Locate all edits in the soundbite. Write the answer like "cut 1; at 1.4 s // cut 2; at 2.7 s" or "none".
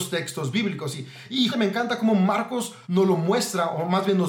cut 1; at 1.5 s // cut 2; at 2.8 s